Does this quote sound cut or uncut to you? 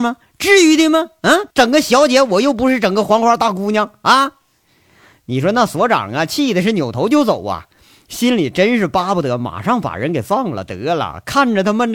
cut